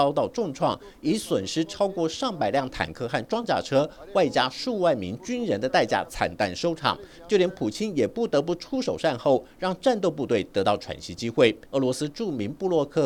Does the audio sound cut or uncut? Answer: cut